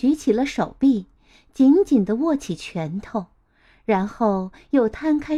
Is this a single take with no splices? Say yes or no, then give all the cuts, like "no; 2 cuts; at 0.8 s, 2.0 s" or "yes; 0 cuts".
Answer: yes; 0 cuts